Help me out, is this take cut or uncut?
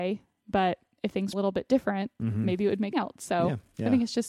cut